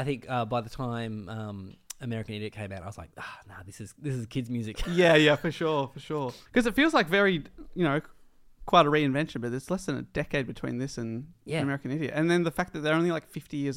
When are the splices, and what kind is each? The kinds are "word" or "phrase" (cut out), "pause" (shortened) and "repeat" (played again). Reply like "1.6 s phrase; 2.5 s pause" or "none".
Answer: 6.5 s pause